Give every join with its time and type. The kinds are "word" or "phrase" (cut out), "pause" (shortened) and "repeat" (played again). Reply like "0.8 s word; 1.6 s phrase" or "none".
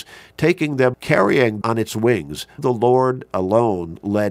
0.9 s word; 1.6 s word; 2.6 s word